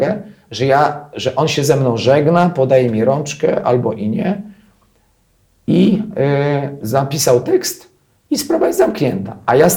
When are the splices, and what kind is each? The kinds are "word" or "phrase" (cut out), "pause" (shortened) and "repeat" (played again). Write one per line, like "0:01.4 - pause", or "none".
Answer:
none